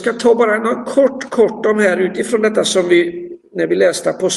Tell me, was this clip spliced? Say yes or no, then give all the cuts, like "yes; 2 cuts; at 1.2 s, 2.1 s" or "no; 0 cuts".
no; 0 cuts